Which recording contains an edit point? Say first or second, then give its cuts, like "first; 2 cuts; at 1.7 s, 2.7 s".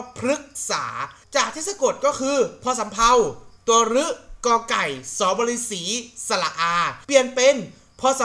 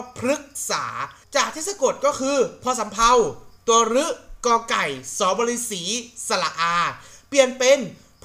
first; 1 cut; at 7.0 s